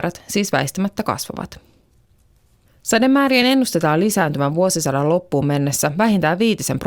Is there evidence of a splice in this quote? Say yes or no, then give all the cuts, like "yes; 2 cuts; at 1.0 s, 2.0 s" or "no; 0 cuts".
no; 0 cuts